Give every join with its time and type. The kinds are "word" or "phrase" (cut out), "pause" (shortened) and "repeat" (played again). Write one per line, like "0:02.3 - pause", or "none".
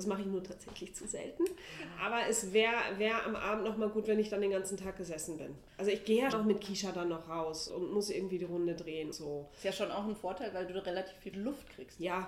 0:05.7 - pause
0:06.3 - word
0:07.7 - word
0:09.1 - word
0:11.3 - word